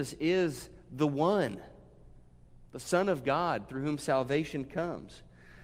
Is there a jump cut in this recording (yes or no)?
no